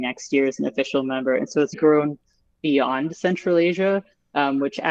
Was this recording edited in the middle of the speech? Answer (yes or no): yes